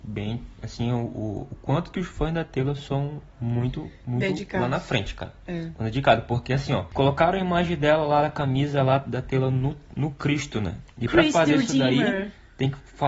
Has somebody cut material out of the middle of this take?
yes; 1 cut; at 3.3 s

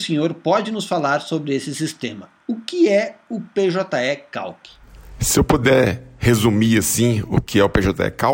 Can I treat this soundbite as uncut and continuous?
yes; 0 cuts

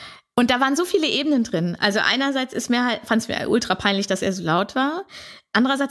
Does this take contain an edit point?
no; 0 cuts

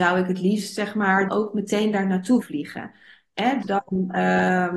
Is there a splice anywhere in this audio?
yes; 3 cuts; at 1.3 s, 2.4 s, 3.6 s

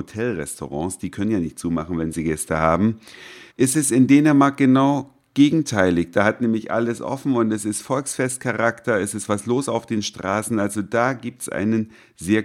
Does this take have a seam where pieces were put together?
yes; 1 cut; at 3.5 s

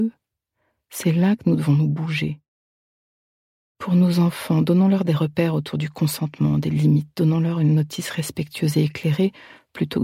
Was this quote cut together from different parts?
no; 0 cuts

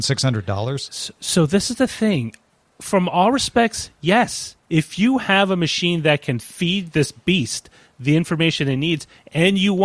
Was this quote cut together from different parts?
no; 0 cuts

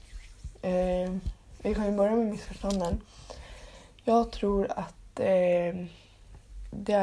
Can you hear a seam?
no; 0 cuts

